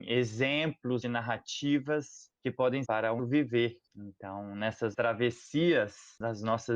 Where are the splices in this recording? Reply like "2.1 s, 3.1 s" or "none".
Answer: 1.0 s, 2.8 s, 3.2 s, 4.9 s